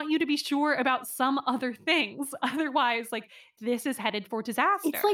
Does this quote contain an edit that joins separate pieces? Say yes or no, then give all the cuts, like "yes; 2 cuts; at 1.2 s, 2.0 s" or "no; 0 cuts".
no; 0 cuts